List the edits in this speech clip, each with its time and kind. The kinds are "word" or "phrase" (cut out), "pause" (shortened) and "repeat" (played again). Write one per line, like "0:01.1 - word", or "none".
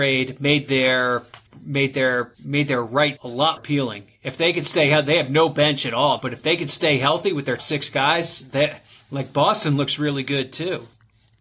0:03.2 - word
0:03.6 - word
0:06.2 - word
0:07.6 - word